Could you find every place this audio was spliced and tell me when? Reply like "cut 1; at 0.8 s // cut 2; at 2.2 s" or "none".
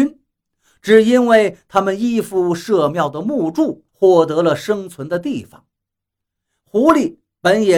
cut 1; at 3.9 s